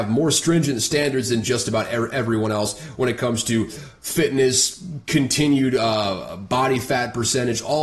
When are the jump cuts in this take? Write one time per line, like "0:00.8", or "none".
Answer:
none